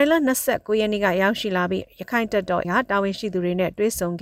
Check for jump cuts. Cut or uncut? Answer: cut